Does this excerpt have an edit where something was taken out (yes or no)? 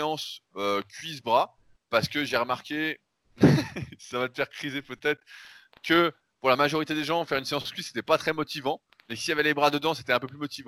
no